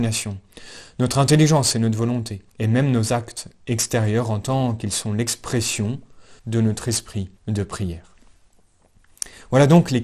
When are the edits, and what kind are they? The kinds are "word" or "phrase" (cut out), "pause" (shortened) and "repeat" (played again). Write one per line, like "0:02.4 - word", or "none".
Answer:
0:02.5 - pause
0:06.4 - pause
0:07.4 - pause